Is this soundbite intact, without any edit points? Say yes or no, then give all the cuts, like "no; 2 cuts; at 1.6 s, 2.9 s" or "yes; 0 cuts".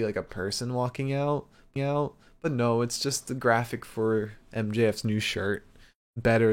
no; 1 cut; at 1.8 s